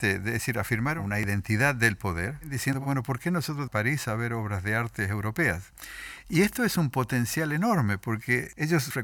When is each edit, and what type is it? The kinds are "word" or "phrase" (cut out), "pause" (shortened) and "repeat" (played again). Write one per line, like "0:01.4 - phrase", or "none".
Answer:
0:03.7 - phrase